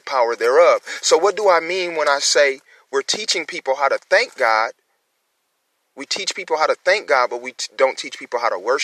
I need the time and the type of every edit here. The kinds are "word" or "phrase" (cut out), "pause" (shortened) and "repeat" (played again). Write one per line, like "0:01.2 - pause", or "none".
none